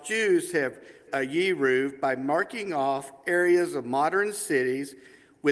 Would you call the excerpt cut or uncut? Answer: cut